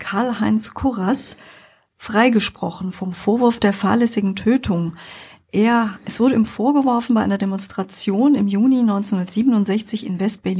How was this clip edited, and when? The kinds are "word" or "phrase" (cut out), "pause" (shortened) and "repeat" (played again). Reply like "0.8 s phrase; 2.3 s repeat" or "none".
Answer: none